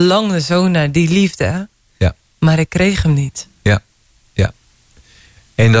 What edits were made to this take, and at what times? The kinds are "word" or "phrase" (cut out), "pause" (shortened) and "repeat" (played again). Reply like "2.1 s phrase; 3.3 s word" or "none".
none